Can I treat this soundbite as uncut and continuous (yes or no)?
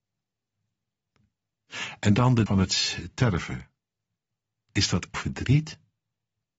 no